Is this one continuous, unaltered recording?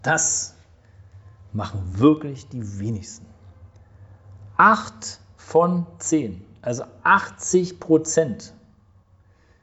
yes; 0 cuts

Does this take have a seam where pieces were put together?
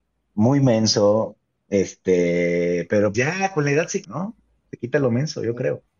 yes; 2 cuts; at 3.1 s, 4.0 s

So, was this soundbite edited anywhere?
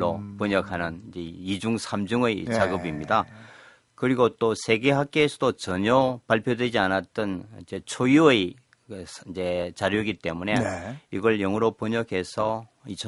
no; 0 cuts

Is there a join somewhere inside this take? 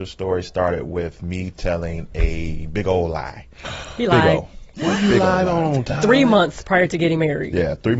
no; 0 cuts

